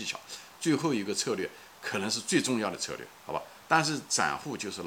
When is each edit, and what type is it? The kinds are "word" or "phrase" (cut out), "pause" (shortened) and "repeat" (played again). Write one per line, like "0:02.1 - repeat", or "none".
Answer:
0:03.2 - pause